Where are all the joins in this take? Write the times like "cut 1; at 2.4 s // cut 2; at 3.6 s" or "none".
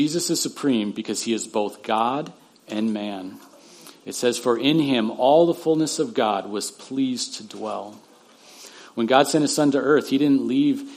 none

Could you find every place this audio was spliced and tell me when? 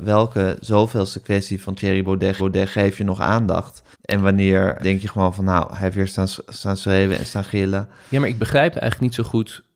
cut 1; at 2.4 s // cut 2; at 3.9 s // cut 3; at 4.8 s

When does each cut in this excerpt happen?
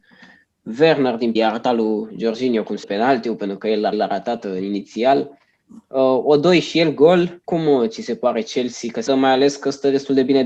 cut 1; at 1.4 s // cut 2; at 2.8 s // cut 3; at 3.9 s // cut 4; at 7.4 s // cut 5; at 9.1 s

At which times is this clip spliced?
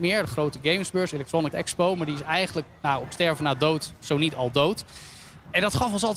cut 1; at 1.5 s

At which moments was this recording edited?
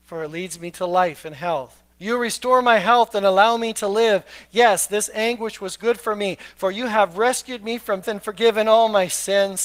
cut 1; at 1.9 s // cut 2; at 8.0 s

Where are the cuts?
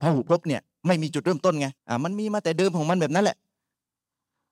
cut 1; at 1.8 s

